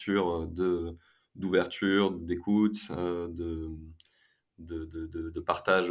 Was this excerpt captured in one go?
yes; 0 cuts

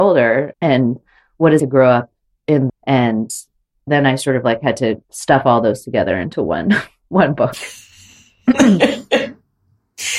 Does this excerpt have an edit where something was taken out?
yes; 3 cuts; at 1.6 s, 2.7 s, 5.0 s

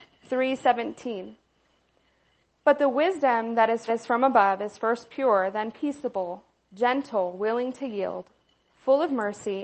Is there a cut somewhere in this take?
yes; 1 cut; at 3.9 s

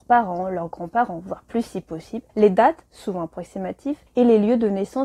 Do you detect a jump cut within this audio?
yes; 2 cuts; at 2.3 s, 4.1 s

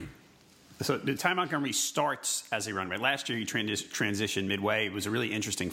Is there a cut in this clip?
yes; 1 cut; at 1.2 s

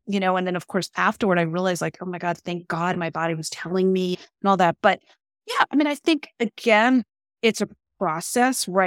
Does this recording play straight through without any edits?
yes; 0 cuts

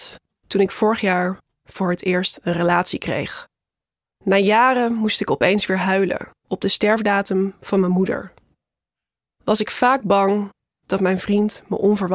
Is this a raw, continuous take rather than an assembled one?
no; 1 cut; at 6.4 s

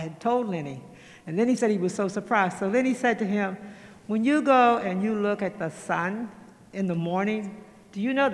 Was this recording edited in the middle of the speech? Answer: no; 0 cuts

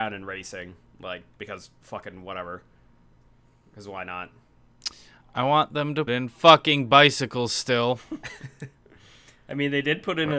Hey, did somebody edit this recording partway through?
yes; 1 cut; at 6.1 s

